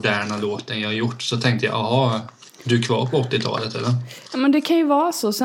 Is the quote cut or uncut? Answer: uncut